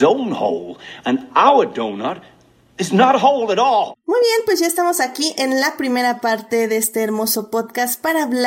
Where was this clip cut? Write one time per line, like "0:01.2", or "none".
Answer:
none